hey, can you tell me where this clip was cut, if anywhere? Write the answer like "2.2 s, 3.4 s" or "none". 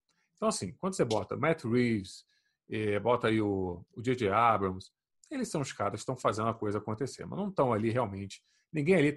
none